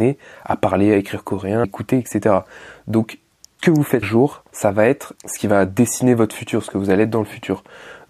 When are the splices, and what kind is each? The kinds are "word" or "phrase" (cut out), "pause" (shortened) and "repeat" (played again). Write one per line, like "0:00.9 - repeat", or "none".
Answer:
0:01.6 - word
0:03.6 - word
0:04.0 - word
0:04.5 - pause
0:05.2 - word